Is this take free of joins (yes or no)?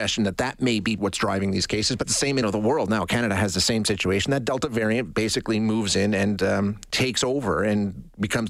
no